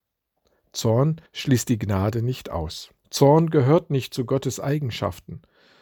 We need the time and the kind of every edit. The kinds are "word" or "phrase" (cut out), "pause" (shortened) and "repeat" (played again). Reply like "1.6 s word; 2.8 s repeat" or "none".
1.3 s pause; 3.0 s pause